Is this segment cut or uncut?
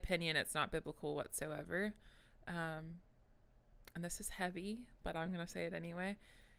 uncut